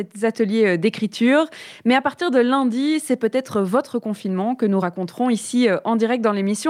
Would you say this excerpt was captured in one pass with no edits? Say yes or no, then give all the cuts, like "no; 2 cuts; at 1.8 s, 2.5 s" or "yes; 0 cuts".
yes; 0 cuts